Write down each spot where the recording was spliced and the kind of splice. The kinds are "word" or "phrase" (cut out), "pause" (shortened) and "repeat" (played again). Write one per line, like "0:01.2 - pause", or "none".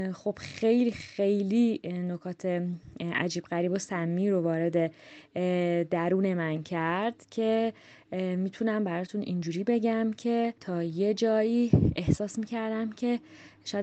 0:00.9 - word
0:10.6 - pause